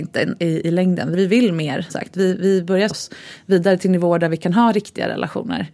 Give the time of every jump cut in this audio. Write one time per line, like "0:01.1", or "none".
0:01.1
0:01.9
0:02.9